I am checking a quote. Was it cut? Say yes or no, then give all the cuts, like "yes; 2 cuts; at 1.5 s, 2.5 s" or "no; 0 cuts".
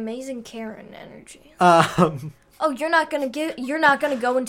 no; 0 cuts